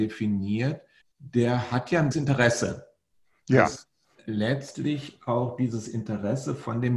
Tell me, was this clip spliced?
yes; 3 cuts; at 1.0 s, 2.1 s, 4.2 s

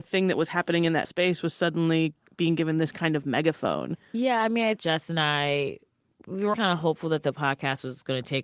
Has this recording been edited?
yes; 3 cuts; at 1.0 s, 4.8 s, 6.5 s

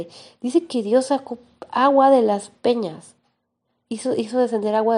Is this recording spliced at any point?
no; 0 cuts

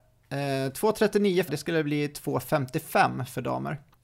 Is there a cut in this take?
yes; 1 cut; at 1.5 s

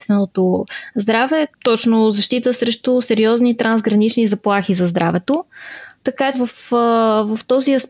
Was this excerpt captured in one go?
no; 2 cuts; at 1.5 s, 6.3 s

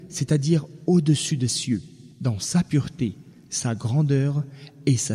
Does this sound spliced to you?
yes; 2 cuts; at 1.5 s, 2.1 s

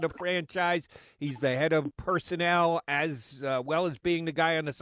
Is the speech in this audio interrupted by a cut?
no; 0 cuts

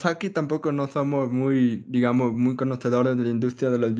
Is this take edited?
no; 0 cuts

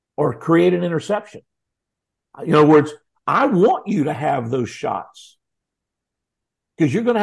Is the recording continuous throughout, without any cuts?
yes; 0 cuts

